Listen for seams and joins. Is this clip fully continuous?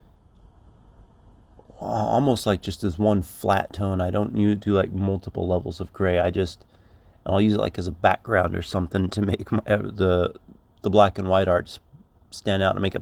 no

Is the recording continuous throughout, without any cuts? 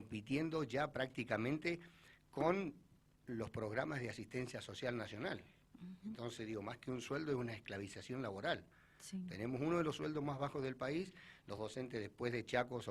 yes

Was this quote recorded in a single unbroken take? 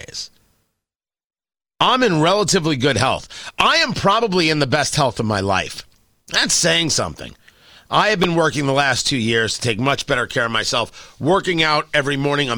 yes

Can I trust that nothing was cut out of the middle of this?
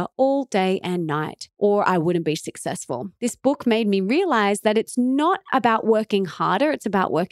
yes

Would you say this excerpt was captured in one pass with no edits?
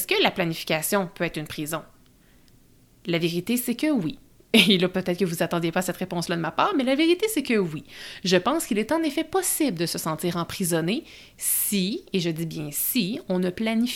yes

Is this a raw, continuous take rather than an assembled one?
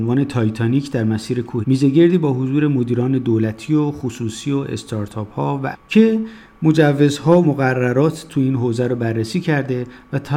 no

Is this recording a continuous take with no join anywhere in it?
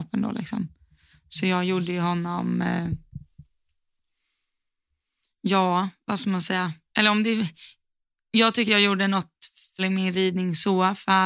no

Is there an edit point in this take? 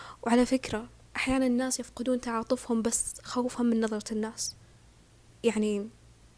no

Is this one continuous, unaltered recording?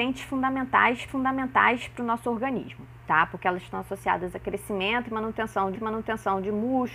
no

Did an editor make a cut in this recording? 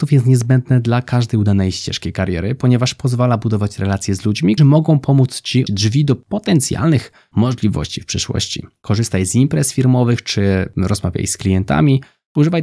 yes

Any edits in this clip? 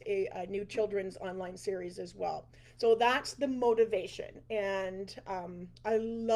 no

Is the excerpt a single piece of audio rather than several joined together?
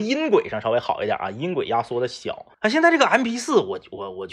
no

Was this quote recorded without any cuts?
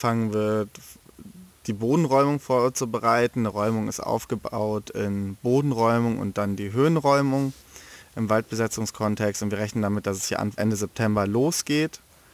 no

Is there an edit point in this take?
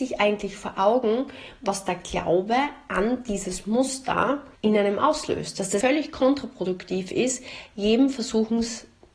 yes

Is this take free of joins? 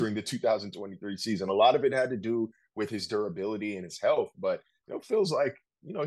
yes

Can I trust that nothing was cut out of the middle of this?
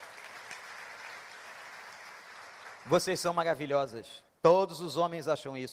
no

